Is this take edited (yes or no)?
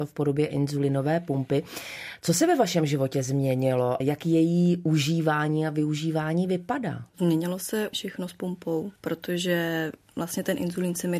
yes